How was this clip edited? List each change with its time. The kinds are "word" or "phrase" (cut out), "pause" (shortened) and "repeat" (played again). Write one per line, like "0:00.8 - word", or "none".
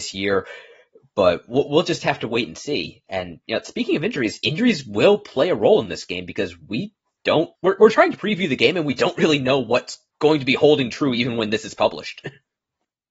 0:07.5 - pause
0:10.1 - pause